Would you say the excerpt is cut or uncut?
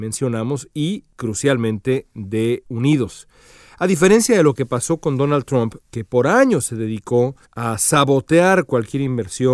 cut